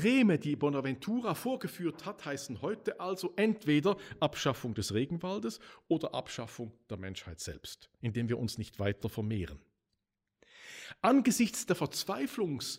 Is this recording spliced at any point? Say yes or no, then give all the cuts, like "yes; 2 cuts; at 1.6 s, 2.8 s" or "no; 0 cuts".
no; 0 cuts